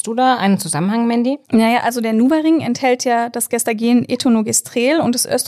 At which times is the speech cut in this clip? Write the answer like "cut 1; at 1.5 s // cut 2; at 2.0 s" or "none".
cut 1; at 1.4 s